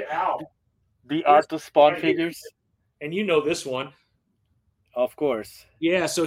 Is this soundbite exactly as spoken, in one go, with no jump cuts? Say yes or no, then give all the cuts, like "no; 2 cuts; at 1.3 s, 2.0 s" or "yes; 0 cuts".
yes; 0 cuts